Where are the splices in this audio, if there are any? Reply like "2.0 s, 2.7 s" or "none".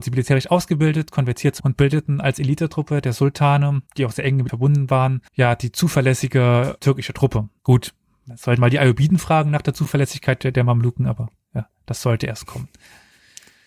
1.6 s, 3.9 s, 4.5 s, 5.3 s, 6.8 s, 7.6 s, 8.6 s